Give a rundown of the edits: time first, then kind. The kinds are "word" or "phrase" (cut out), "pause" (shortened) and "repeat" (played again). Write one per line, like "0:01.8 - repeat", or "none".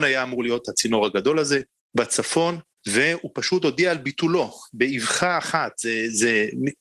none